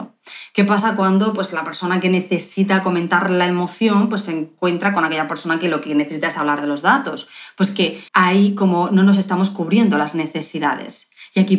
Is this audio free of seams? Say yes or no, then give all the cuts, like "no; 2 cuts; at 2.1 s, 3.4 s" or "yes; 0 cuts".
no; 1 cut; at 8.1 s